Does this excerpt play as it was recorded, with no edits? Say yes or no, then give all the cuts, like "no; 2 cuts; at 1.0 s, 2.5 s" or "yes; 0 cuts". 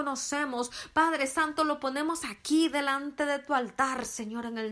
yes; 0 cuts